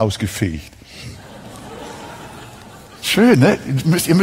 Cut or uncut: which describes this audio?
uncut